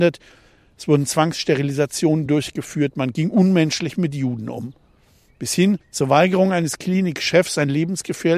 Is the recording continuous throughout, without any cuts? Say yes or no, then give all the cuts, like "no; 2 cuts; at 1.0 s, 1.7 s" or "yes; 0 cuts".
yes; 0 cuts